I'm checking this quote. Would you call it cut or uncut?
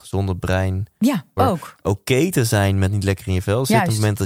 cut